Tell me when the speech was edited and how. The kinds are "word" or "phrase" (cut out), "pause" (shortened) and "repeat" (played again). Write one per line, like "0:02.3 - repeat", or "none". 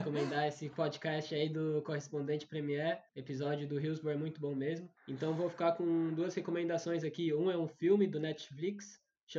0:03.1 - pause
0:05.0 - pause